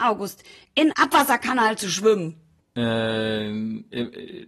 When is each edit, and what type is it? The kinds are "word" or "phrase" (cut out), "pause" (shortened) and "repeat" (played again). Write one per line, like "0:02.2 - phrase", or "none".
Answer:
0:00.9 - word